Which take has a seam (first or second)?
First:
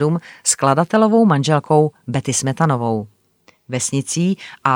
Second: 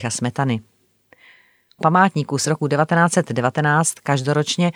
second